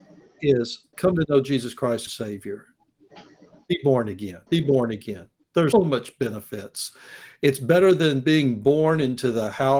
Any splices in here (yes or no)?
yes